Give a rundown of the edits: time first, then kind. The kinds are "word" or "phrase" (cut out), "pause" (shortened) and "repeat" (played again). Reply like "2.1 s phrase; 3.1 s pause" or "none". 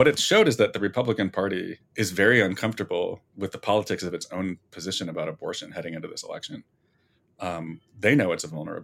1.8 s pause; 3.3 s pause